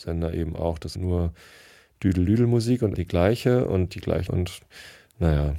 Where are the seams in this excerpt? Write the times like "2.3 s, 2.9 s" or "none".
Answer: 0.9 s, 2.9 s, 3.9 s, 4.3 s